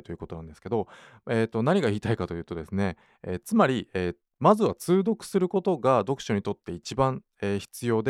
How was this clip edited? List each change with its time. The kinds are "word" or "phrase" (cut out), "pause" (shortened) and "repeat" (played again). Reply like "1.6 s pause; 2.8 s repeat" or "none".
none